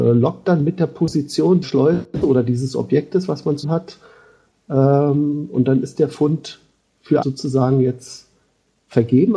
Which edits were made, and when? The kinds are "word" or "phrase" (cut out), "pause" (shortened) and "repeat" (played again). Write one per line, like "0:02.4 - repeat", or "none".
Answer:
0:01.6 - word
0:03.6 - word
0:07.2 - word